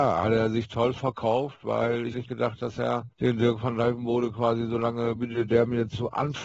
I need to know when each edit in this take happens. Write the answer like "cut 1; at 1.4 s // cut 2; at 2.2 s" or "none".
cut 1; at 2.1 s // cut 2; at 3.1 s // cut 3; at 5.2 s